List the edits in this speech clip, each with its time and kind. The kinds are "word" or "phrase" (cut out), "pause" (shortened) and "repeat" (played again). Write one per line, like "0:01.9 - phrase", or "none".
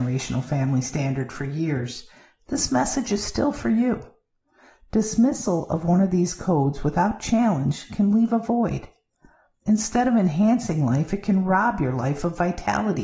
none